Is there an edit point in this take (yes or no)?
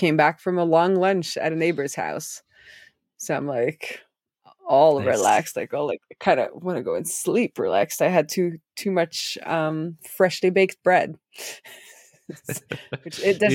no